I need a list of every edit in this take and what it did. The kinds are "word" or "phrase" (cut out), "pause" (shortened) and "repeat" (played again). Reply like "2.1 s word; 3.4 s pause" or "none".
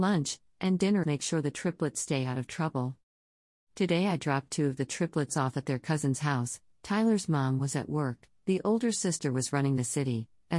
1.0 s phrase

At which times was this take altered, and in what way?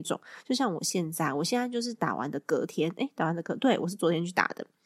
none

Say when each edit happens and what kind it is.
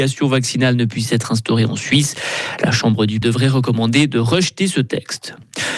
3.2 s word

